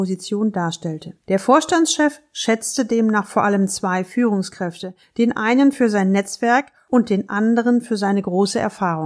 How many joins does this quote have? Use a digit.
1